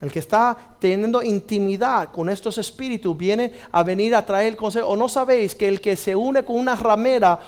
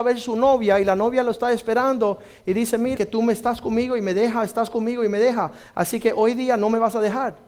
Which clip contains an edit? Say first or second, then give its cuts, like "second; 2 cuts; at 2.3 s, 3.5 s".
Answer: second; 1 cut; at 3.0 s